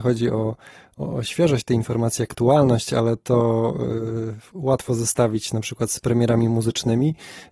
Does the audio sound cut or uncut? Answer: uncut